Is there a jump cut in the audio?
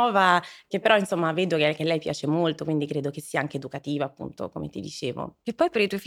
no; 0 cuts

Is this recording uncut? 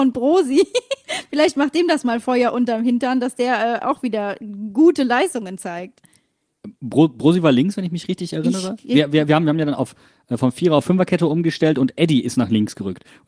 yes; 0 cuts

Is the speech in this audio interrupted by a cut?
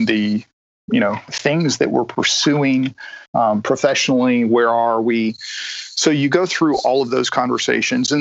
yes; 2 cuts; at 1.3 s, 3.3 s

